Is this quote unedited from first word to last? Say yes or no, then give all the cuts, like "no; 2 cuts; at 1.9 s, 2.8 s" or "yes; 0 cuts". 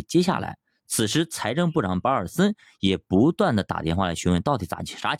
yes; 0 cuts